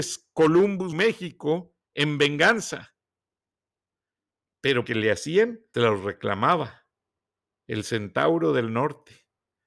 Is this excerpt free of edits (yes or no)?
no